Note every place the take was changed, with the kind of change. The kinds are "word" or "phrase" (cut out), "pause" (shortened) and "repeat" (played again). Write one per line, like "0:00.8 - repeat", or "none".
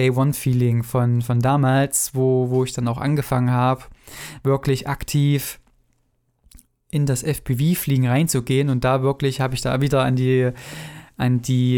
none